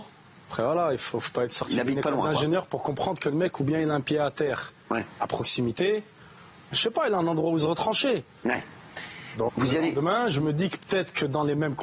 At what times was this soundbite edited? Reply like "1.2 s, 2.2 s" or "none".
6.7 s, 9.5 s